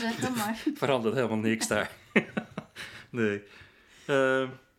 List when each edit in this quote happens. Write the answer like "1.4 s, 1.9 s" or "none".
none